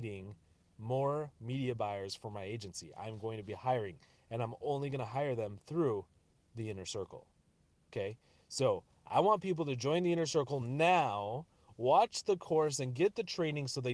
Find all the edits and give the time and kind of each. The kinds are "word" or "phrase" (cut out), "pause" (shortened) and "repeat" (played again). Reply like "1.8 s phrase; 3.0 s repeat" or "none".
none